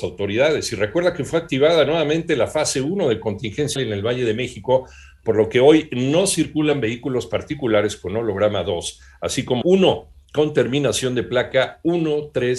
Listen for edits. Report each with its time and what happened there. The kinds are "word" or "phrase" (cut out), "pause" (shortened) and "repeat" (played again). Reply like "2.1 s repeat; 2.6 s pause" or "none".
3.8 s word; 9.6 s word